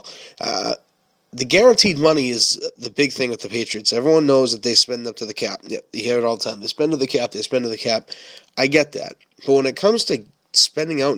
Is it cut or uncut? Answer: uncut